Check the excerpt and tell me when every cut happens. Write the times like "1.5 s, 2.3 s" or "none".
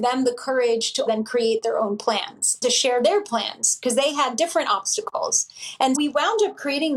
1.1 s, 2.6 s, 5.9 s